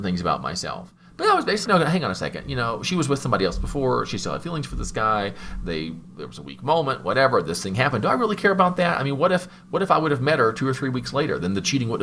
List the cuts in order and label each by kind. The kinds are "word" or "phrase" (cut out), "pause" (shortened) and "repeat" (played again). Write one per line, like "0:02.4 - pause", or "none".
0:01.7 - word